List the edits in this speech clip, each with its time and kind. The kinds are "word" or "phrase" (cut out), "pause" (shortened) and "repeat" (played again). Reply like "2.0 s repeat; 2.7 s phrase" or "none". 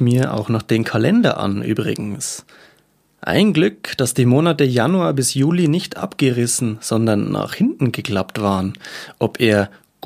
none